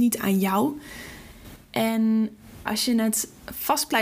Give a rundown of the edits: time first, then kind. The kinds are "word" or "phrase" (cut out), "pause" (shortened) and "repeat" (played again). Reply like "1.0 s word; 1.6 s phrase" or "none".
2.7 s word